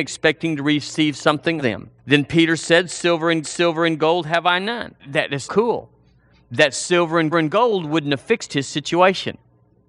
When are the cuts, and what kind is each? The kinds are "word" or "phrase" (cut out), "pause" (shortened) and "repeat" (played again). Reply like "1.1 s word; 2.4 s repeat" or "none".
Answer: 1.6 s word; 2.0 s pause; 3.4 s repeat; 5.0 s pause; 5.4 s word; 7.3 s repeat